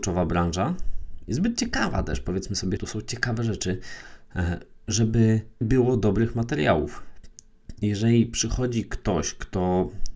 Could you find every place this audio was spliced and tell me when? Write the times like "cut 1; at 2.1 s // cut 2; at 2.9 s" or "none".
cut 1; at 2.8 s // cut 2; at 5.6 s